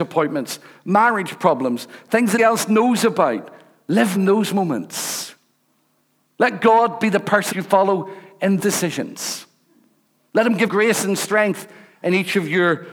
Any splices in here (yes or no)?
yes